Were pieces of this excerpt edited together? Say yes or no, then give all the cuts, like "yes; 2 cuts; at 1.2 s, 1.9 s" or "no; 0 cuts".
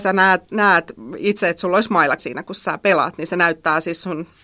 yes; 1 cut; at 2.2 s